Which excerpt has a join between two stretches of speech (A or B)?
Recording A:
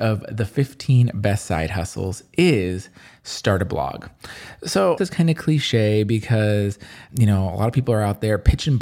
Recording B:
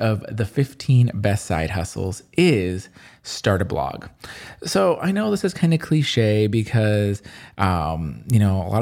A